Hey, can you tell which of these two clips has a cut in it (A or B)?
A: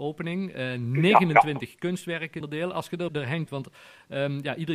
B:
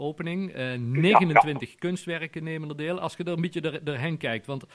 A